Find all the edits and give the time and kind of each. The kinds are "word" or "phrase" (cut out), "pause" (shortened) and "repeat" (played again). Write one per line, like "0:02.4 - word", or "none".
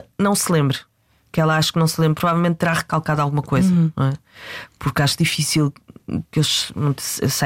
0:06.2 - pause